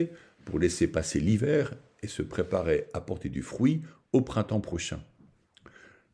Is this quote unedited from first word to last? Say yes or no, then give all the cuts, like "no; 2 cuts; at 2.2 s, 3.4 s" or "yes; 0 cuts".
yes; 0 cuts